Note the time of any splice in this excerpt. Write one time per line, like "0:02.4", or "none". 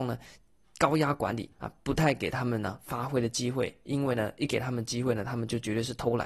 0:01.5